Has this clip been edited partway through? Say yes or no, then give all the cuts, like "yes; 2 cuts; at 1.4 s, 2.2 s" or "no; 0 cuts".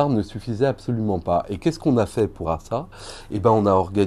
yes; 1 cut; at 2.4 s